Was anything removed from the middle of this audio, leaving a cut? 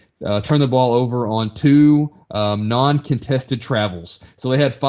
no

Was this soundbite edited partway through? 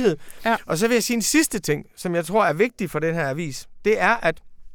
no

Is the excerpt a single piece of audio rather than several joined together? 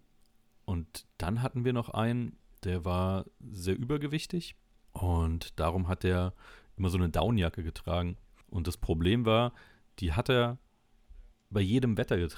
yes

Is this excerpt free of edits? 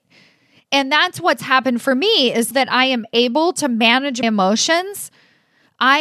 no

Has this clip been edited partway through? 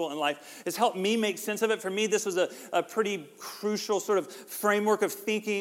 no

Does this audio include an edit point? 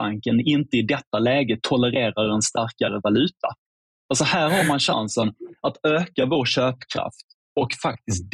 no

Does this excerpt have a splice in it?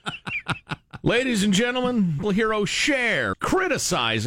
yes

